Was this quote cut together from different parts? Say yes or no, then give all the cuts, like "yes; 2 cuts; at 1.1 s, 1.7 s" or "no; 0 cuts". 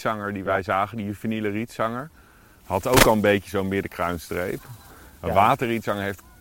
no; 0 cuts